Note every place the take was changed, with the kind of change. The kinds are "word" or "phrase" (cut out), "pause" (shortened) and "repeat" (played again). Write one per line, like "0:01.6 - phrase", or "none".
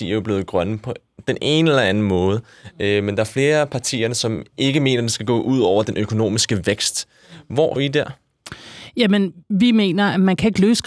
0:07.8 - word
0:09.4 - pause